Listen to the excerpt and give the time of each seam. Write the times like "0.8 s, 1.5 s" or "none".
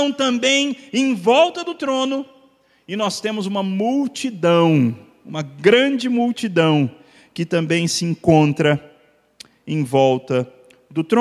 none